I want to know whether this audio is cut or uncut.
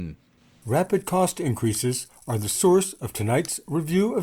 uncut